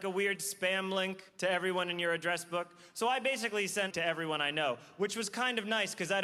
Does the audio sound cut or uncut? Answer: cut